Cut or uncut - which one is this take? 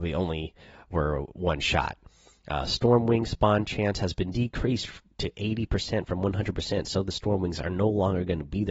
uncut